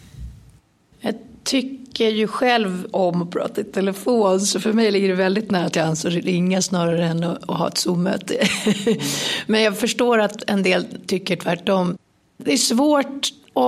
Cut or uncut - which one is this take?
uncut